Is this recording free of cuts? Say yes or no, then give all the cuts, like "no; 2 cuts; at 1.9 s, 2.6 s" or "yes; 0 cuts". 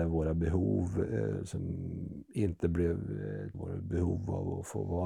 no; 1 cut; at 3.5 s